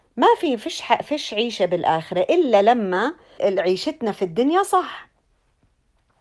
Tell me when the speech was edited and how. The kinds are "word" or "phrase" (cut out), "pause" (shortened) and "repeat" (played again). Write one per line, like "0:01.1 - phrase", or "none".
0:03.4 - word

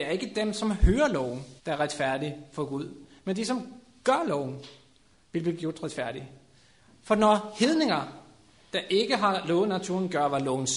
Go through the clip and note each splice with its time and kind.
0:01.6 - pause

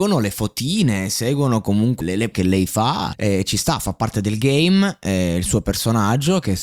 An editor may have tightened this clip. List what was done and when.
0:02.0 - word
0:02.3 - word
0:03.1 - word

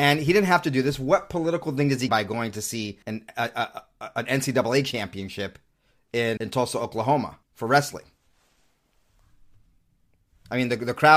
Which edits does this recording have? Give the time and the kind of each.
0:02.1 - word
0:03.0 - pause
0:06.4 - word
0:07.4 - pause

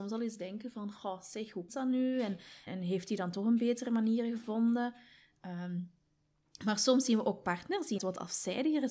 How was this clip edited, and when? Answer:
0:01.7 - word
0:02.7 - word
0:08.0 - word

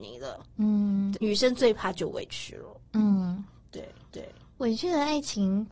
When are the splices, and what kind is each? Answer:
0:01.1 - word
0:04.1 - repeat

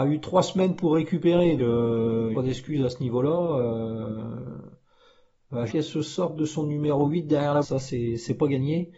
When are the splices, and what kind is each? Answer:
0:01.6 - word
0:02.3 - phrase
0:05.7 - phrase
0:07.6 - word

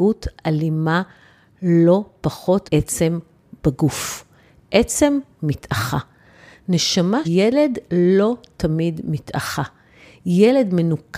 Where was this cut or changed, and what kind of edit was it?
0:02.7 - word
0:07.2 - word

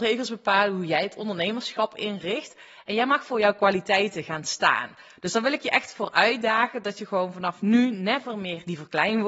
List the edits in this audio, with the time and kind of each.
none

